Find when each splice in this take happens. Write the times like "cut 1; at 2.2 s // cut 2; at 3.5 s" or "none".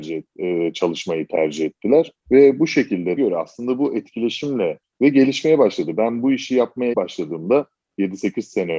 cut 1; at 2.2 s // cut 2; at 3.2 s // cut 3; at 4.8 s // cut 4; at 6.9 s

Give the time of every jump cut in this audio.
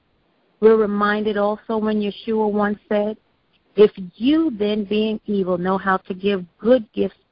none

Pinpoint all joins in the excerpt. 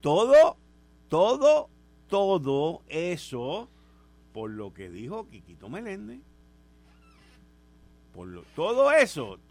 none

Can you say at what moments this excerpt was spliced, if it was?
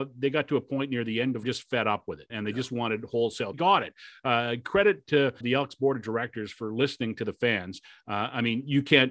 cut 1; at 1.4 s // cut 2; at 2.3 s // cut 3; at 3.5 s // cut 4; at 5.4 s

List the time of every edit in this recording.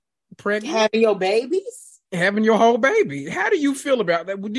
none

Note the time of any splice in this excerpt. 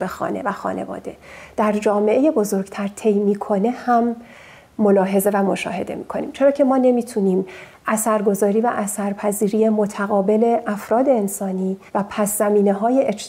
cut 1; at 11.9 s

